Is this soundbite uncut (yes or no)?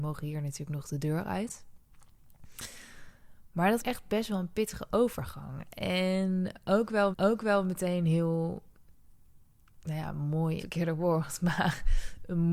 no